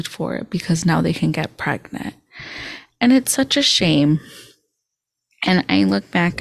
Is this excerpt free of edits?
yes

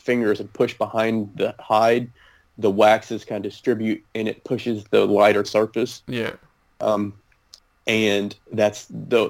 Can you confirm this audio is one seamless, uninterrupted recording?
no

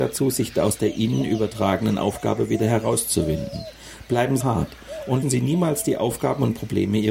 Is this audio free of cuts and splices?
no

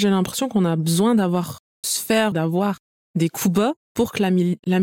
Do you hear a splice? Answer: yes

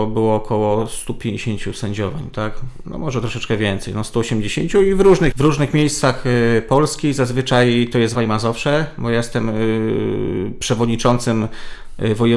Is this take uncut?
no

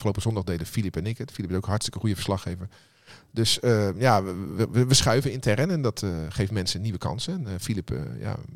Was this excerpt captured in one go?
yes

